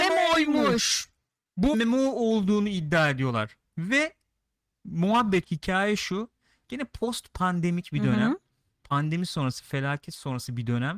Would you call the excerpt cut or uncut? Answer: cut